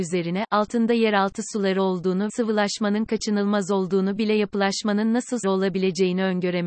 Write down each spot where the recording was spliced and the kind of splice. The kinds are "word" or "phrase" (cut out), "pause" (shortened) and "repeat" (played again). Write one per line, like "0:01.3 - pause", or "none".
0:02.3 - phrase
0:04.2 - word
0:05.4 - word